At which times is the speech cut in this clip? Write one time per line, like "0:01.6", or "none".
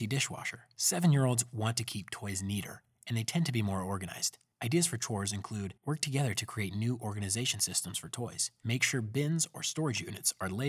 0:05.8